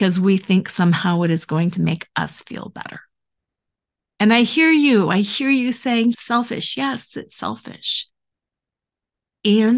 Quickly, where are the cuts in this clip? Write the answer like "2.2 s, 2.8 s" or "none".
3.7 s, 6.1 s